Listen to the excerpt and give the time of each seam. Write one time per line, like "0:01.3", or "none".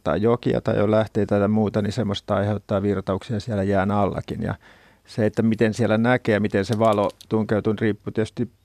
none